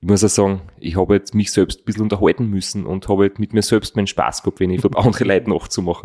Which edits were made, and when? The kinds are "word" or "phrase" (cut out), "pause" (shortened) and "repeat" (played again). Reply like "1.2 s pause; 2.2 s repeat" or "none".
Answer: 4.8 s word